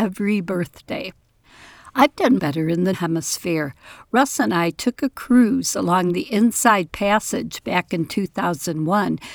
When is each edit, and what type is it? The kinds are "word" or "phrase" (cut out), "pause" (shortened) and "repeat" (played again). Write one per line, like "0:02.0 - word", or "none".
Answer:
0:02.4 - word
0:02.9 - word